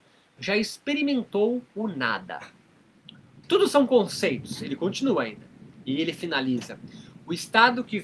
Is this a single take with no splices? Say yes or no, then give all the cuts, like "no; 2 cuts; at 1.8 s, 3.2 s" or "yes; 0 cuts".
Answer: no; 2 cuts; at 1.7 s, 3.4 s